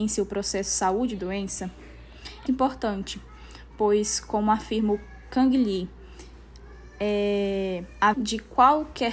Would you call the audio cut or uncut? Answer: cut